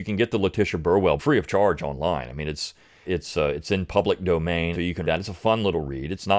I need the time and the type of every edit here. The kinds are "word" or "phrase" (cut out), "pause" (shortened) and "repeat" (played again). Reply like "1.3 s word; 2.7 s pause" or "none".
1.2 s word; 3.0 s word; 4.7 s word; 5.0 s word